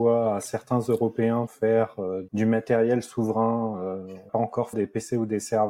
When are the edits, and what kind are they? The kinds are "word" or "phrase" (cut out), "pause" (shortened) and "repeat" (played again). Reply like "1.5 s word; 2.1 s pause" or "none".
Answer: 1.5 s word; 2.3 s word; 4.3 s phrase; 4.7 s word